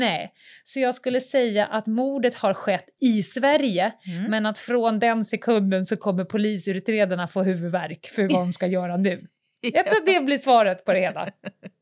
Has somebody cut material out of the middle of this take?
no; 0 cuts

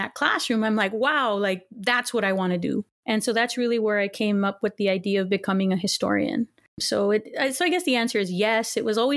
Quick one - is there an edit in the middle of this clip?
no; 0 cuts

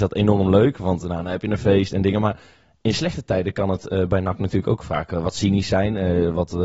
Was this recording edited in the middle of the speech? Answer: no; 0 cuts

